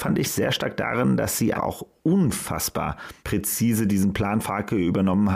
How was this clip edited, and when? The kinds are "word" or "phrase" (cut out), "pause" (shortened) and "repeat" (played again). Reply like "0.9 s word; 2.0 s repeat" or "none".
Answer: 1.5 s word; 3.2 s pause; 4.4 s word